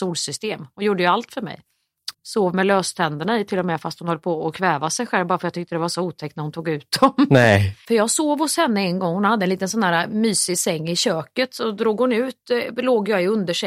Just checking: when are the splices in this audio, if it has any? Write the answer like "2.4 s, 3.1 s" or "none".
2.1 s, 7.8 s